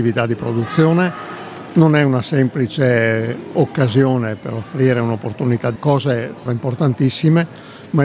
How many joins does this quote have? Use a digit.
2